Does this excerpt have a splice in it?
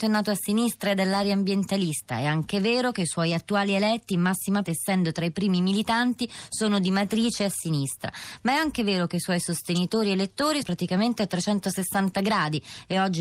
yes; 2 cuts; at 4.6 s, 10.6 s

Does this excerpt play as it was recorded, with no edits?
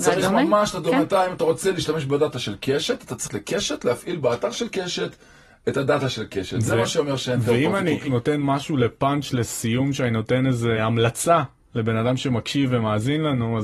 no; 1 cut; at 3.3 s

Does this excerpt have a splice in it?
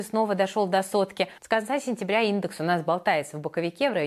yes; 1 cut; at 1.4 s

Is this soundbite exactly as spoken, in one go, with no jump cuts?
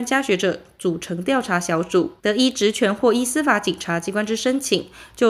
no; 1 cut; at 2.2 s

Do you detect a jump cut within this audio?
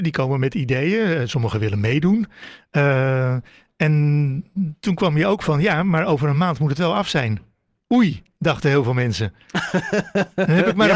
no; 0 cuts

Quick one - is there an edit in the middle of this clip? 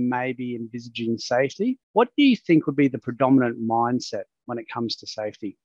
yes; 1 cut; at 1.8 s

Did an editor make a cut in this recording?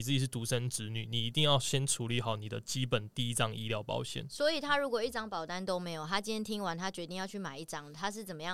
no; 0 cuts

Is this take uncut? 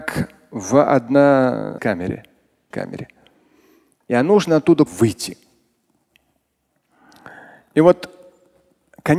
no; 3 cuts; at 1.8 s, 2.7 s, 4.9 s

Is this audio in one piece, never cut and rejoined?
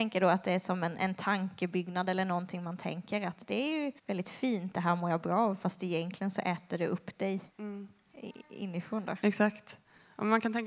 no; 2 cuts; at 4.0 s, 7.5 s

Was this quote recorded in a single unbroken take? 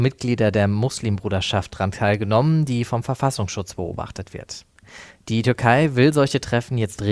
yes; 0 cuts

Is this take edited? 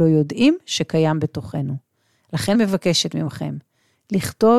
yes; 1 cut; at 2.5 s

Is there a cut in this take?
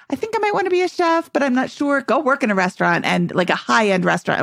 no; 0 cuts

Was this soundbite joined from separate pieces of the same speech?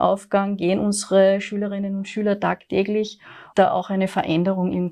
yes; 1 cut; at 3.5 s

